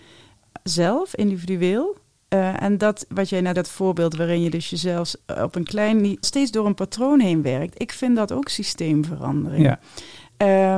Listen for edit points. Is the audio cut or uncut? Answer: cut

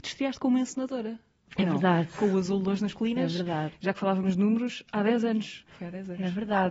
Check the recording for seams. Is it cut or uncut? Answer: uncut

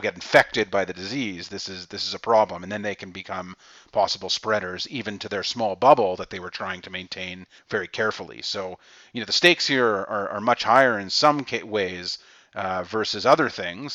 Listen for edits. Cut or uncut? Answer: uncut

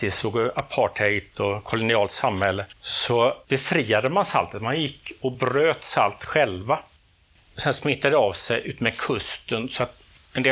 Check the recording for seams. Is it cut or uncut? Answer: uncut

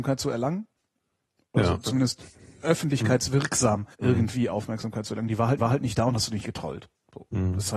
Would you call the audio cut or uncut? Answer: cut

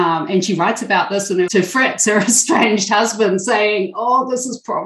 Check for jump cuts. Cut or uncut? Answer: cut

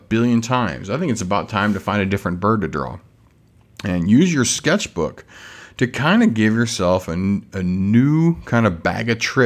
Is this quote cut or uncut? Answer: uncut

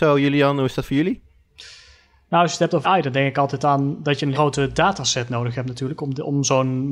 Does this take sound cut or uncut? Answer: cut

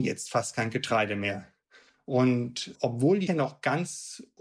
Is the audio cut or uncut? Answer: cut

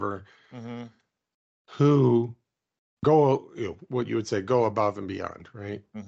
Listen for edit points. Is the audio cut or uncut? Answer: uncut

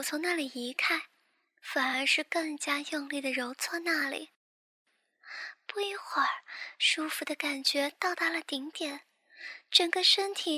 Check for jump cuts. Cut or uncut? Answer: uncut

